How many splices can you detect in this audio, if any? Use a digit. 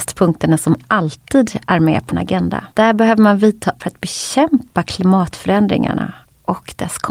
3